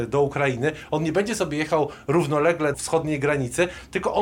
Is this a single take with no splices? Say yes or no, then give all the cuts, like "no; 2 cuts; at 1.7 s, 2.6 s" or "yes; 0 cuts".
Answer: no; 1 cut; at 2.7 s